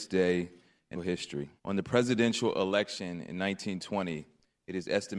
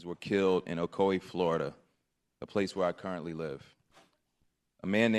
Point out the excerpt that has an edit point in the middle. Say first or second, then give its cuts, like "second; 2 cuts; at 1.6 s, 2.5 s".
first; 2 cuts; at 0.9 s, 1.6 s